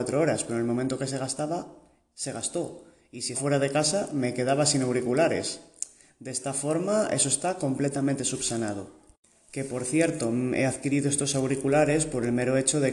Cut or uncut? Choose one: cut